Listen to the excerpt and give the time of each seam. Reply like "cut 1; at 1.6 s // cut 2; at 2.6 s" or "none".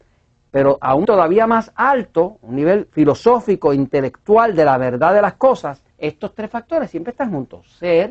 cut 1; at 1.0 s // cut 2; at 2.9 s // cut 3; at 5.9 s